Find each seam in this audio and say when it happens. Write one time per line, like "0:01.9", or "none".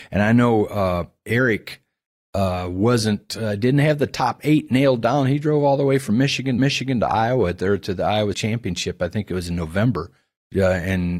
0:06.6
0:08.3